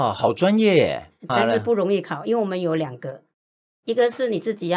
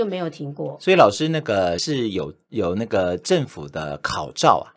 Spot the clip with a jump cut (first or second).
first